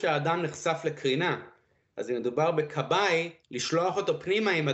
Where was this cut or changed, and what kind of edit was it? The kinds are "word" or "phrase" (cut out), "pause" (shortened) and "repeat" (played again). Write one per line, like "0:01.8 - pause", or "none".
none

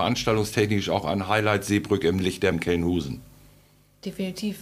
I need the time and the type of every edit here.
0:02.5 - word

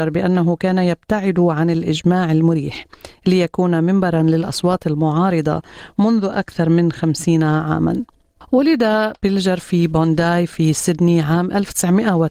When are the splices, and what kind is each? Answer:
none

